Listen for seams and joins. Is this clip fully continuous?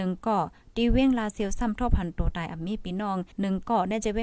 no; 1 cut; at 3.3 s

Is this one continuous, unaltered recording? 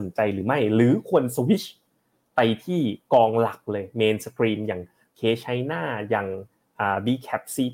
yes; 0 cuts

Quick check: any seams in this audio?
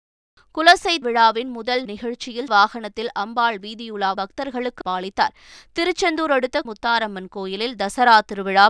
yes; 6 cuts; at 1.0 s, 1.8 s, 2.5 s, 4.1 s, 4.8 s, 6.6 s

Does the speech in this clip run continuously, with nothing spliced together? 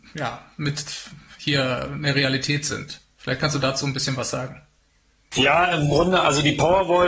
yes; 0 cuts

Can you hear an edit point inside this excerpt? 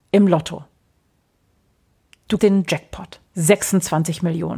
yes; 2 cuts; at 2.4 s, 3.3 s

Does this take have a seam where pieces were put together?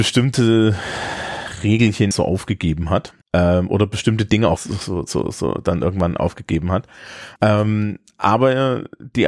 yes; 4 cuts; at 2.1 s, 3.2 s, 4.6 s, 7.4 s

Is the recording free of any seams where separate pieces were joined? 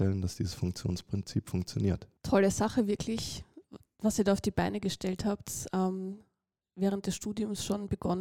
no; 1 cut; at 2.2 s

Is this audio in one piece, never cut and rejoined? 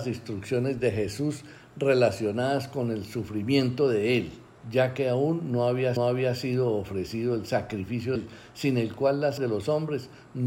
no; 4 cuts; at 4.6 s, 6.0 s, 8.2 s, 9.4 s

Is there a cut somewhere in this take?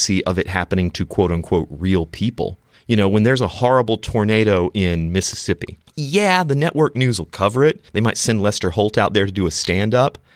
yes; 3 cuts; at 2.7 s, 5.9 s, 7.9 s

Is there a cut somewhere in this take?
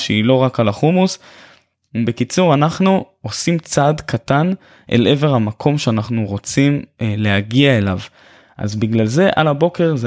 no; 0 cuts

